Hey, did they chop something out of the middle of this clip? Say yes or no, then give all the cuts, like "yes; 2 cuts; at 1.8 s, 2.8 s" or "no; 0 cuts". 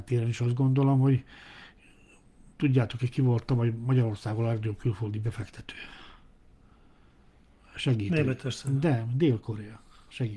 no; 0 cuts